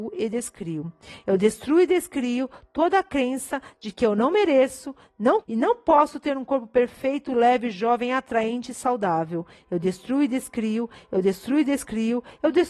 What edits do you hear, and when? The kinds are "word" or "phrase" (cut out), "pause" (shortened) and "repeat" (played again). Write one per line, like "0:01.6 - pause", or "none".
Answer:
0:05.4 - word